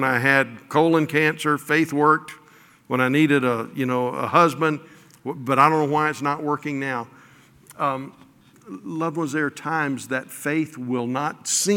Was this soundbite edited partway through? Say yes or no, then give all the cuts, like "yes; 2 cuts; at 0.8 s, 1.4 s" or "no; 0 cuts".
no; 0 cuts